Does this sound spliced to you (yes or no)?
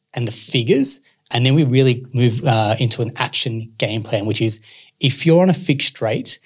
no